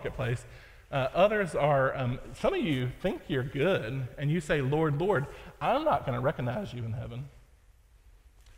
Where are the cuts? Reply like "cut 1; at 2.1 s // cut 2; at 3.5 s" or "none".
none